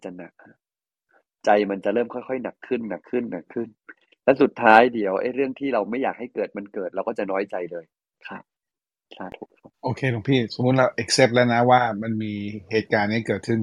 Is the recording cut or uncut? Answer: cut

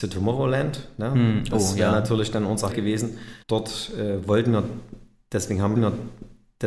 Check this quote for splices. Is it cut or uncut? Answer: cut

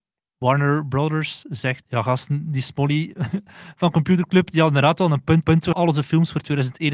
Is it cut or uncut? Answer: cut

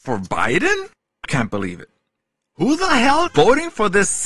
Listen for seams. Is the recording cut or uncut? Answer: cut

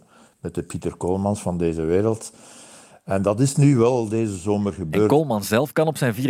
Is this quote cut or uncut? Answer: uncut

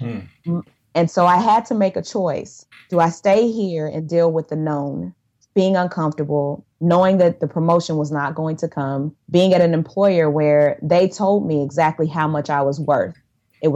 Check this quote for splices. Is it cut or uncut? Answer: cut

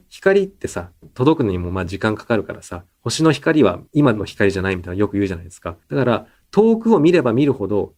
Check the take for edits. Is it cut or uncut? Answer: cut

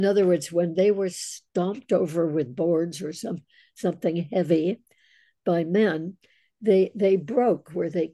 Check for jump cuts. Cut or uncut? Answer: uncut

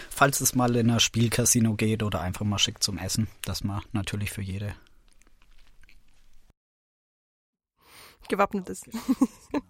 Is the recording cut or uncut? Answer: uncut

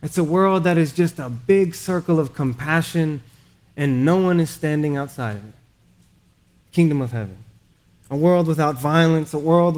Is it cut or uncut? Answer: uncut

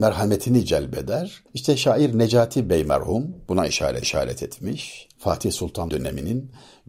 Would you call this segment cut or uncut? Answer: cut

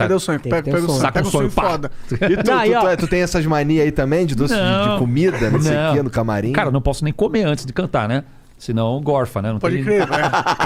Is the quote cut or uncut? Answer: uncut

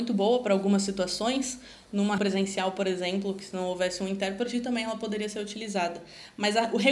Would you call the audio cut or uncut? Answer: cut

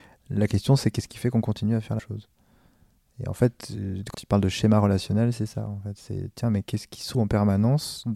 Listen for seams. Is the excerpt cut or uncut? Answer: cut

